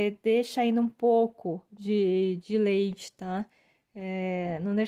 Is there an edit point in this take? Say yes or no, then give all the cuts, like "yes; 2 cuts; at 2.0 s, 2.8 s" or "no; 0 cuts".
no; 0 cuts